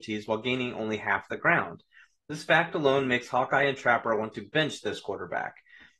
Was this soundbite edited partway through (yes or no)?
no